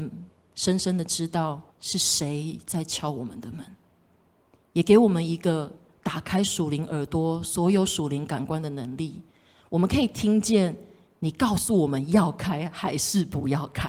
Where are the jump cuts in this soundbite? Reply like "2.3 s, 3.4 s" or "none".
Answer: 1.7 s